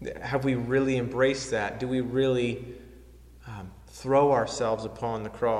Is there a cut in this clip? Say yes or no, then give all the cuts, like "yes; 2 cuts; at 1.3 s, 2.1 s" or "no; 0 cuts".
no; 0 cuts